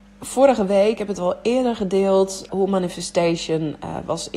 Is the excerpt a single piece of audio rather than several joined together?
no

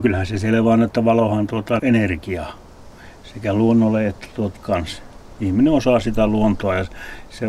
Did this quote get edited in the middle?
yes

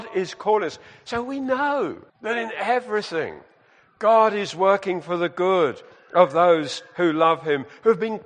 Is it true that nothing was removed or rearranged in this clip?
no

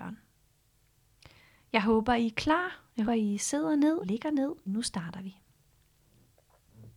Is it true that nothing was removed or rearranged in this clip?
no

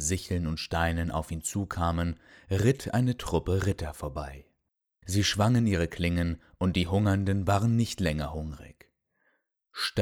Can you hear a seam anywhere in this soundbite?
no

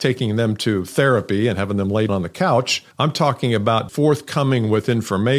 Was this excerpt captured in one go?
no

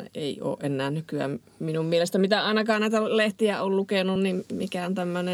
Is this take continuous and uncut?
yes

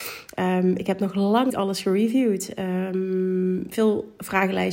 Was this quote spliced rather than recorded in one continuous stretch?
yes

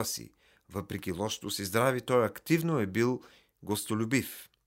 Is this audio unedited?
yes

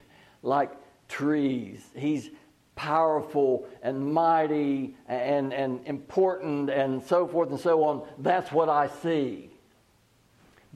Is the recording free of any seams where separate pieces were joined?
yes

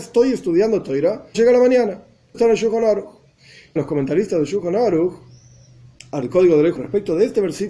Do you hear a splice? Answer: yes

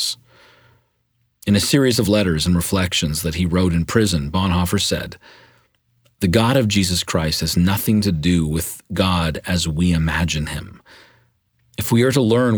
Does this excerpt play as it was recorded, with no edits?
yes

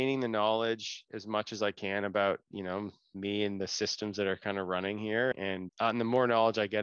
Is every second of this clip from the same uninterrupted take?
no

